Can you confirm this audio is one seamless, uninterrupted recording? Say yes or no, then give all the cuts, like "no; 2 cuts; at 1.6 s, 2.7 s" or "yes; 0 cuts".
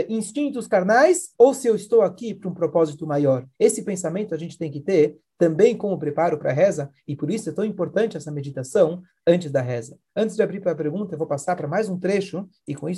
no; 2 cuts; at 1.3 s, 3.5 s